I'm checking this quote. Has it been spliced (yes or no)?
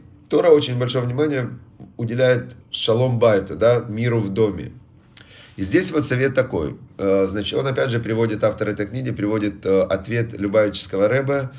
yes